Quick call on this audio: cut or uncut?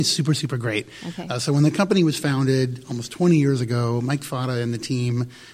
uncut